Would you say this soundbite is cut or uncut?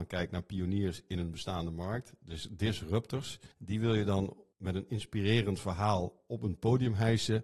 cut